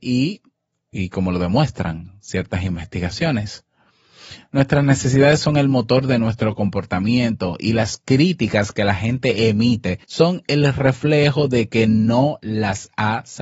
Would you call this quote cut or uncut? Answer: cut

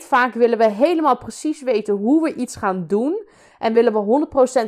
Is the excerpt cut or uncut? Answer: uncut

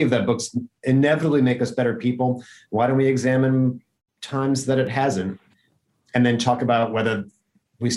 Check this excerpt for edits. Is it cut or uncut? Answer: uncut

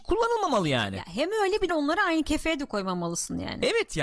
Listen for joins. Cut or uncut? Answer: cut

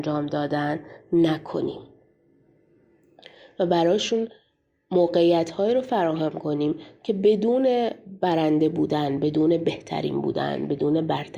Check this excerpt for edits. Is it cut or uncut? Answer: uncut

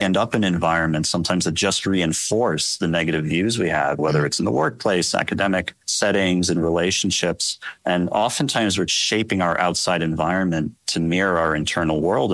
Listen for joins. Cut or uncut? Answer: cut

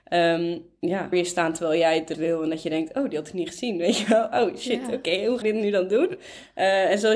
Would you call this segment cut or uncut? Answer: cut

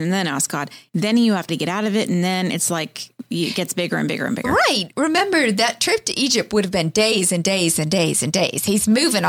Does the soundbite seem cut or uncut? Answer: cut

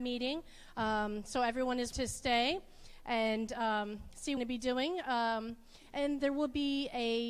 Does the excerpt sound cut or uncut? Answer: cut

